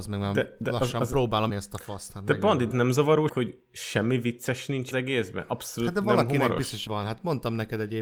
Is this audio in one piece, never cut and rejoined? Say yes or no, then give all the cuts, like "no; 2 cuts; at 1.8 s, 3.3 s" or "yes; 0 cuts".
no; 5 cuts; at 1.5 s, 2.7 s, 3.3 s, 4.9 s, 6.9 s